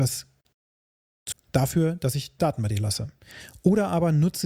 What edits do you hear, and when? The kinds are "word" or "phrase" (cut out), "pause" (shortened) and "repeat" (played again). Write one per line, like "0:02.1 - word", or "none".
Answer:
0:01.3 - word
0:02.4 - word